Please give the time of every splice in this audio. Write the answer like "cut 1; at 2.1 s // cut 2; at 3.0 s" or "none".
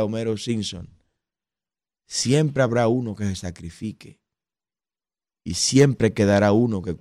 none